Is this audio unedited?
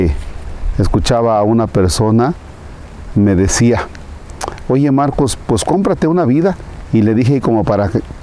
yes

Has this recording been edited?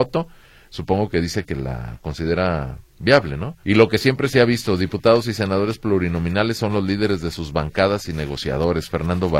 yes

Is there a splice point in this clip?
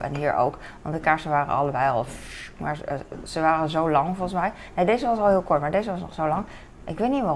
no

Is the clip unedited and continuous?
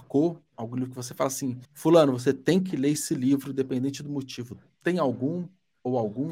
no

